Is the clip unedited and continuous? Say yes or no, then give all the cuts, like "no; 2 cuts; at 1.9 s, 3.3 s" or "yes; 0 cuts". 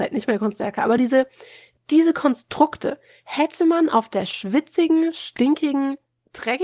yes; 0 cuts